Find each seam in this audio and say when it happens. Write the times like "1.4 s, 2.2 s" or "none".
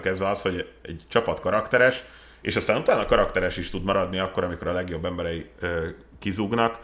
none

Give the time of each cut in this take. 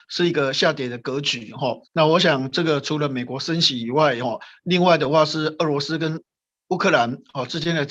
1.9 s

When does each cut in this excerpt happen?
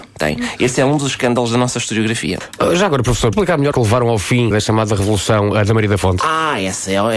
3.3 s, 3.7 s, 4.5 s

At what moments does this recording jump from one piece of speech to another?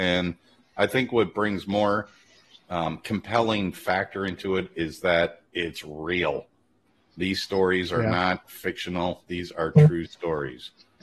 none

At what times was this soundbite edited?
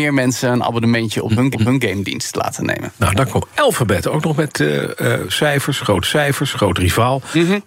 1.5 s, 6.0 s

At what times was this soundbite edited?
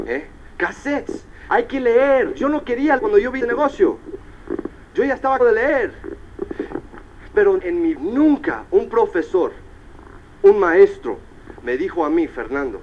1.5 s, 3.0 s, 3.4 s, 5.4 s, 7.6 s, 7.9 s

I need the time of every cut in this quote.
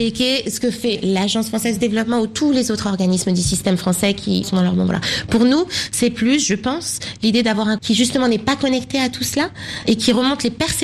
4.4 s, 7.8 s, 9.8 s

